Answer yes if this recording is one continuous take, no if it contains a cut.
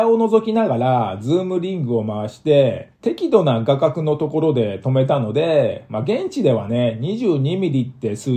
no